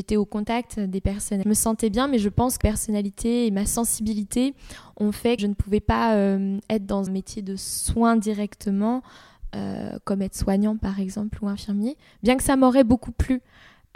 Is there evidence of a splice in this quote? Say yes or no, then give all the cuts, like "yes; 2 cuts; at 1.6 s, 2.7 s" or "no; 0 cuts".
yes; 4 cuts; at 1.4 s, 2.6 s, 5.4 s, 7.1 s